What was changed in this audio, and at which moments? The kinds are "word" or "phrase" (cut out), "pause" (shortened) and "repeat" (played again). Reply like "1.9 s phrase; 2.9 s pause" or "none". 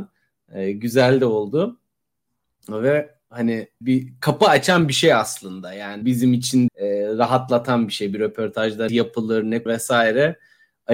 3.8 s word; 4.2 s word; 6.0 s word; 6.7 s word; 8.9 s word; 9.7 s word